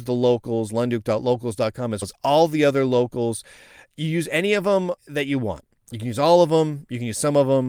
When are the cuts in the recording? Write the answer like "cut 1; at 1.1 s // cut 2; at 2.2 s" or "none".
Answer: cut 1; at 2.0 s // cut 2; at 5.0 s